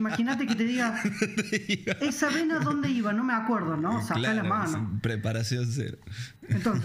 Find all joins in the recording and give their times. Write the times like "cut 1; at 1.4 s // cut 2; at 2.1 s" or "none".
none